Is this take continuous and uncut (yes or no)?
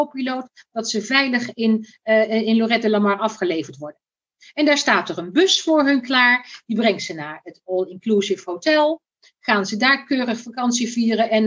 yes